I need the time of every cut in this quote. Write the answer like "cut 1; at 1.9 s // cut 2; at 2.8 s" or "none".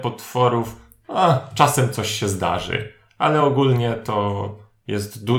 none